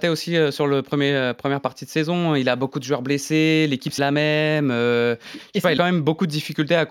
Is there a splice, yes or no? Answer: yes